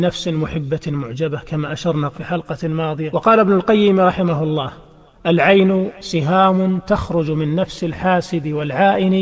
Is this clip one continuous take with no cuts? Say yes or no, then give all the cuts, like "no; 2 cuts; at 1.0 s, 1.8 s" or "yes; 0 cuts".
yes; 0 cuts